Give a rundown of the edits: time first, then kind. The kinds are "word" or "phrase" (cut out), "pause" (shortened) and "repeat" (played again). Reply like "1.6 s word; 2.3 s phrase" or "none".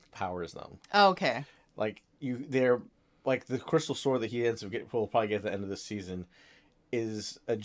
none